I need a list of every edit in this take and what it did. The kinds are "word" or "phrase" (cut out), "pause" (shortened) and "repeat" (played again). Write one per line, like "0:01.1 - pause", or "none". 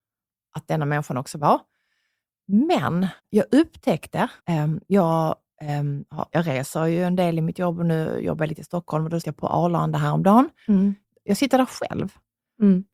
0:03.2 - pause
0:04.4 - pause
0:06.3 - word
0:09.2 - word